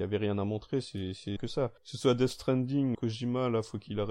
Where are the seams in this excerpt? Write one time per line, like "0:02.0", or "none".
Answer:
0:01.4
0:01.8
0:02.9